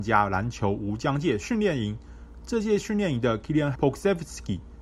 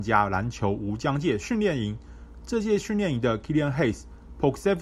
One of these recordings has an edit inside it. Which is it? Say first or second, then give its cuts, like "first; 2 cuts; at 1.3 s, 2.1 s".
first; 1 cut; at 3.7 s